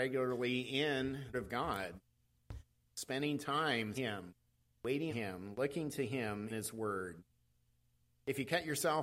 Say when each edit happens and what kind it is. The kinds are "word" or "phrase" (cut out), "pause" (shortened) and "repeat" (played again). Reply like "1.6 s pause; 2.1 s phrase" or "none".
1.3 s phrase; 2.9 s phrase; 3.9 s word; 5.1 s word; 6.5 s word